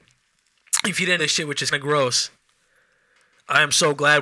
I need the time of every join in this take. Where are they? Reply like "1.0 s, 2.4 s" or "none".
1.2 s, 1.7 s